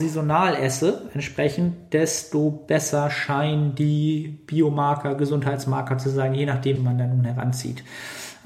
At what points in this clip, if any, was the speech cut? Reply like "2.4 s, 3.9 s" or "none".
6.8 s